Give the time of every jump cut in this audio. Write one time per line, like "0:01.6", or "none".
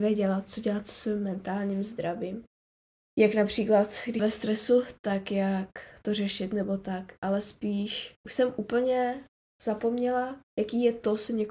0:02.7
0:04.2
0:08.2